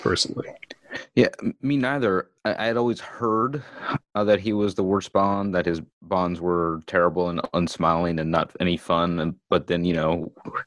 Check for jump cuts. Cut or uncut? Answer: cut